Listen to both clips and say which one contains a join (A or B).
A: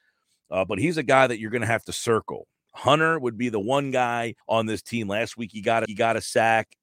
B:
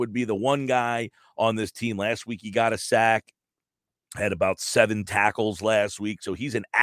A